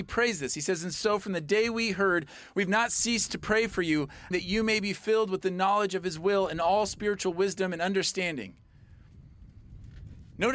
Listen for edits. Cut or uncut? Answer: cut